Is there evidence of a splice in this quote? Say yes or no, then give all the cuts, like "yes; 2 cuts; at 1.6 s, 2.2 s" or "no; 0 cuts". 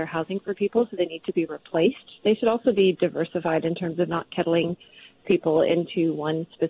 no; 0 cuts